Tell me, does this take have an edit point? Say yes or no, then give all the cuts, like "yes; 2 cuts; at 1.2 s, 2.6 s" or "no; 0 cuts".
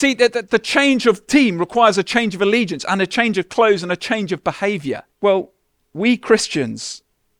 yes; 1 cut; at 5.1 s